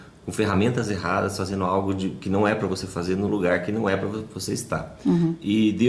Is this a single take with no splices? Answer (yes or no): yes